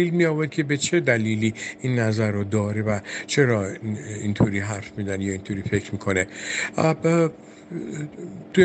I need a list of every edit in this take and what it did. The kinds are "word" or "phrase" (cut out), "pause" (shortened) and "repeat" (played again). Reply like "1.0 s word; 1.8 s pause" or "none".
none